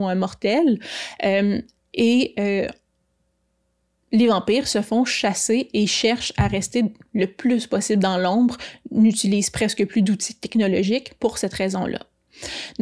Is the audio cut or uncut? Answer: uncut